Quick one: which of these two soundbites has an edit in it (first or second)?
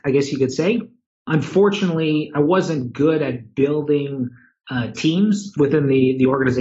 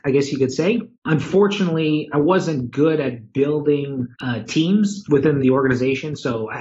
second